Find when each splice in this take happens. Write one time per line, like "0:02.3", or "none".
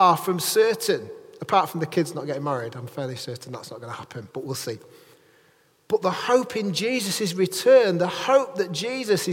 none